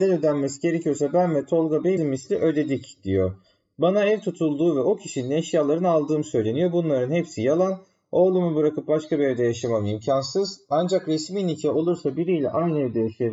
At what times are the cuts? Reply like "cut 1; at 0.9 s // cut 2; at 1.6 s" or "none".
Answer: cut 1; at 2.0 s